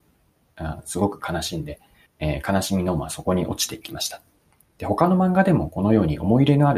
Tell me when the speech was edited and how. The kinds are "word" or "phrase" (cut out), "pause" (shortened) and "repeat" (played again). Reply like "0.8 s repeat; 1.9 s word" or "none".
2.1 s pause; 4.5 s pause